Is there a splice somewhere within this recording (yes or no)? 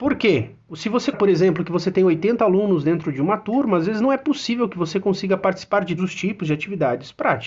yes